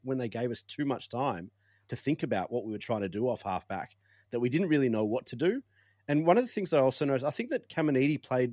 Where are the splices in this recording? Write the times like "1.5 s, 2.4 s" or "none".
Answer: none